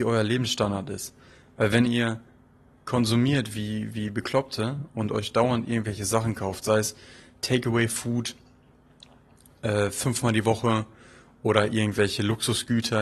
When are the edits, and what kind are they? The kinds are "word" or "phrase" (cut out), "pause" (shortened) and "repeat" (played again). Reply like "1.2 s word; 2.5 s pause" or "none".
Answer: none